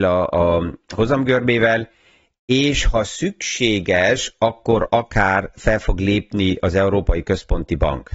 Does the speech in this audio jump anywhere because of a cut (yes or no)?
no